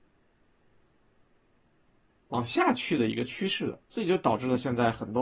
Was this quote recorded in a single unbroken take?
no; 1 cut; at 3.8 s

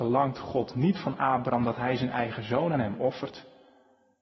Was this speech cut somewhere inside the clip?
no; 0 cuts

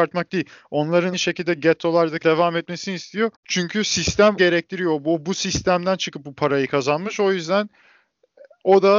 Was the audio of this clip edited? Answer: yes; 4 cuts; at 1.1 s, 2.2 s, 3.3 s, 4.4 s

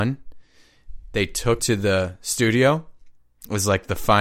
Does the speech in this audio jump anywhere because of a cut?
yes; 1 cut; at 1.6 s

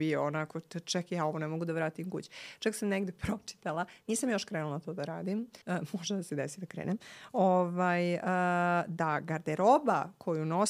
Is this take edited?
yes; 1 cut; at 5.6 s

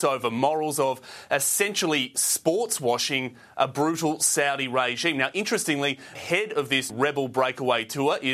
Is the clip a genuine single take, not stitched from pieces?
no; 2 cuts; at 6.1 s, 6.9 s

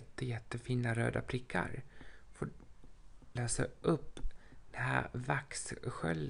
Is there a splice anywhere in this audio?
yes; 1 cut; at 3.4 s

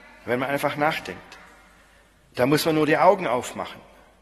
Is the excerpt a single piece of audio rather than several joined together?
yes; 0 cuts

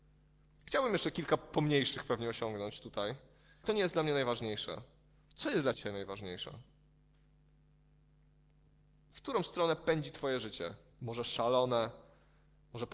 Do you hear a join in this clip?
yes; 2 cuts; at 3.6 s, 5.7 s

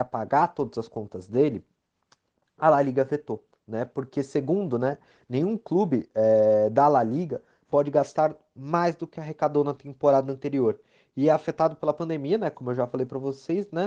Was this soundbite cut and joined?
no; 0 cuts

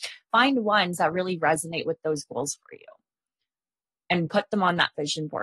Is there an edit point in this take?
no; 0 cuts

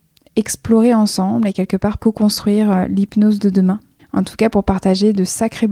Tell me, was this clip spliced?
yes; 2 cuts; at 2.0 s, 4.0 s

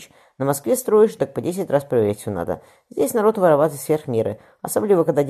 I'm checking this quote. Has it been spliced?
no; 0 cuts

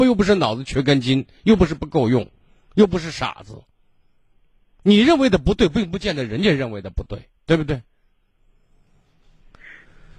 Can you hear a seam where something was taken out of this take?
no; 0 cuts

